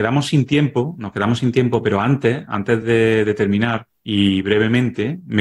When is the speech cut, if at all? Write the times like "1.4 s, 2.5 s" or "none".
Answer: none